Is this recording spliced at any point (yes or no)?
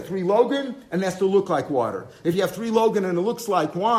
no